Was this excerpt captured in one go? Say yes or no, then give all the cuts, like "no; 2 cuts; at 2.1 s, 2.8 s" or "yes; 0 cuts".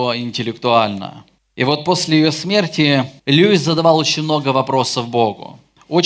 no; 2 cuts; at 1.4 s, 3.2 s